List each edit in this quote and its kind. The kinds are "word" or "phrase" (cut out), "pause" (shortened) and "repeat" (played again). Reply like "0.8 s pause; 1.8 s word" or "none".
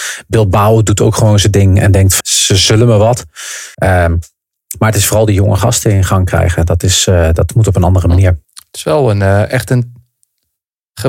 2.2 s word; 3.7 s pause; 8.4 s pause